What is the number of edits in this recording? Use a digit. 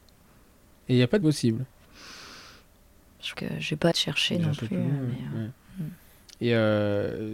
3